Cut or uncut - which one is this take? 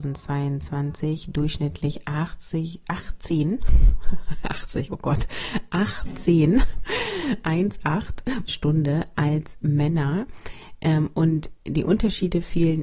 cut